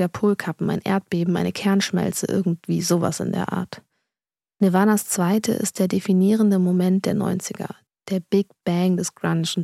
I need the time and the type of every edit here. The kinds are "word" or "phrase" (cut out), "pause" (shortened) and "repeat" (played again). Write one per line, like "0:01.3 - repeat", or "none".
none